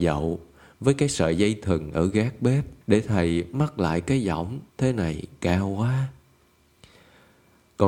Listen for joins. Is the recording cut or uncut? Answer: cut